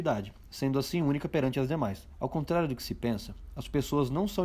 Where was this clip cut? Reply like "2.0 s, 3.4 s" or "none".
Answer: 2.1 s